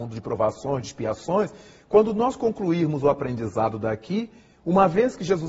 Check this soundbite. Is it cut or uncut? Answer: uncut